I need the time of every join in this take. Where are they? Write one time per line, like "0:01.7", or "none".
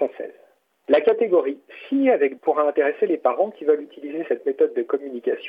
0:02.4